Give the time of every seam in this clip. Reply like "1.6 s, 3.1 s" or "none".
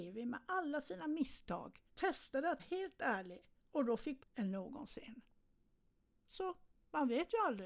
1.9 s, 2.6 s, 3.6 s, 4.2 s